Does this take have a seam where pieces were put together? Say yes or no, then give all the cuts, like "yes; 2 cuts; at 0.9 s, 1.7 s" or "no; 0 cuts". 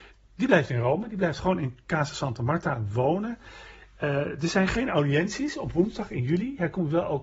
no; 0 cuts